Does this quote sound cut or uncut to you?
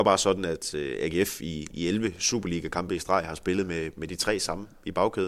uncut